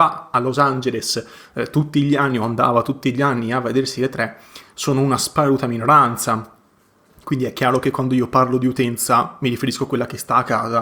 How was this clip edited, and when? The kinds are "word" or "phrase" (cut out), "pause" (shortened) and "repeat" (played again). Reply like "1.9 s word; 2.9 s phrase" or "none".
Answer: none